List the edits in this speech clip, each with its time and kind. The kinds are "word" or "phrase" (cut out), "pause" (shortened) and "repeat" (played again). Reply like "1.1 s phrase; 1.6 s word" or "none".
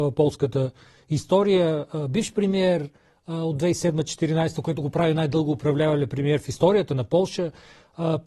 none